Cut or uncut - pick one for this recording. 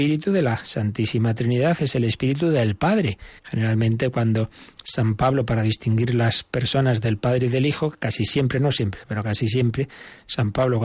cut